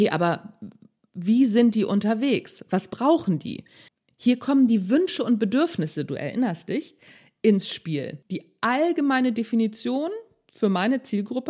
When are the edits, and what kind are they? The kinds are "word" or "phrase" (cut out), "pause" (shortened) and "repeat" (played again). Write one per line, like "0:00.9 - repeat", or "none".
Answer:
0:03.9 - pause
0:08.2 - pause